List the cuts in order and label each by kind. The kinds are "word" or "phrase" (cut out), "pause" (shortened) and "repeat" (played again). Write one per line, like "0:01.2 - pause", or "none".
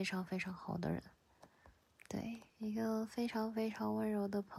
0:02.5 - pause